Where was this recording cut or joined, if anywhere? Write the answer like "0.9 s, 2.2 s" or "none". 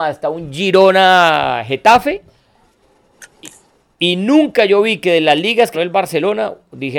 5.7 s